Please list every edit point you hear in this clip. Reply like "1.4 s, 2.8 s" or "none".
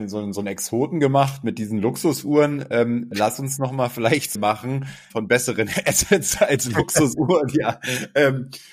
4.3 s, 5.1 s